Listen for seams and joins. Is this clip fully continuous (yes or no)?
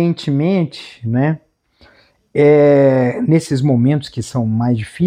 yes